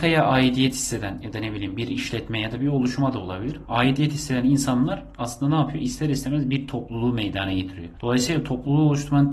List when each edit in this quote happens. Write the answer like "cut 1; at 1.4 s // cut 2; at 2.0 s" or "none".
none